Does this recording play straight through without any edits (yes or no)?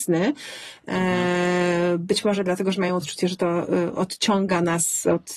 yes